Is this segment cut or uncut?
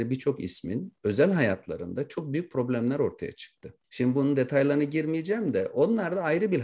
cut